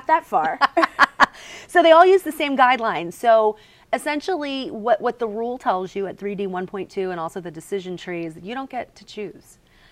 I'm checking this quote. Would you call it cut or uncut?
uncut